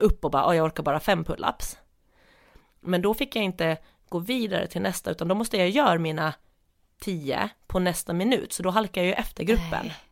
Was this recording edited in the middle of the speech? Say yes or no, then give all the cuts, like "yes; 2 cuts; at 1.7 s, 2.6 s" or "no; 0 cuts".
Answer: no; 0 cuts